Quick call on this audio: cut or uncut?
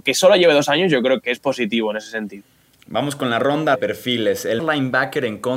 cut